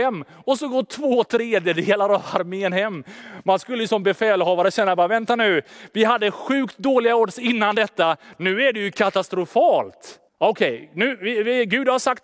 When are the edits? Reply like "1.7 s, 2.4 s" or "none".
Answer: 10.3 s